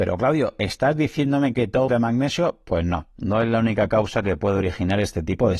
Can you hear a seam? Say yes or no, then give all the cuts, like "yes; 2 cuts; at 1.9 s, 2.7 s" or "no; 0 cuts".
yes; 1 cut; at 1.9 s